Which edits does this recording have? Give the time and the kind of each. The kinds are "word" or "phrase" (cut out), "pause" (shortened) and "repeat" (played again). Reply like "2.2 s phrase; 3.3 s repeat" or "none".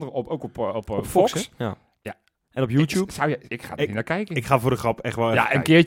3.5 s word